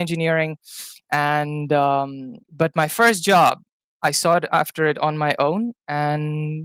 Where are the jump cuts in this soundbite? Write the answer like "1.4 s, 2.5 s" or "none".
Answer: 2.4 s